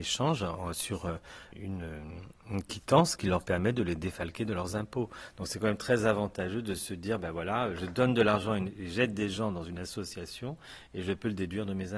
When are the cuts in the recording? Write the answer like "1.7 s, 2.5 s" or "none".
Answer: 1.5 s

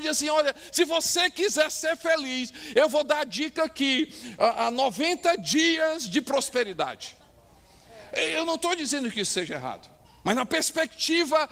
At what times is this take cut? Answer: 10.0 s

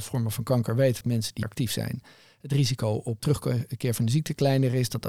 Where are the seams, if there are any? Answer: 1.0 s, 1.4 s, 3.2 s

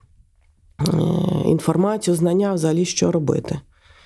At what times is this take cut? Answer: none

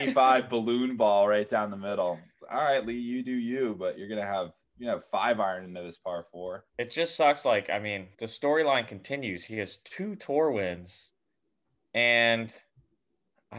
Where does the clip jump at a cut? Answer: 4.6 s, 6.7 s, 8.1 s

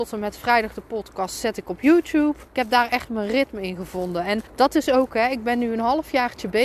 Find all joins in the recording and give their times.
2.5 s, 4.5 s

